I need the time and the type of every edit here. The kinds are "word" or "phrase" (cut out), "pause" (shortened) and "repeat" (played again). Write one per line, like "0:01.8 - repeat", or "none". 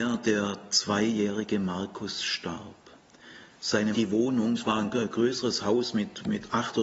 0:03.9 - phrase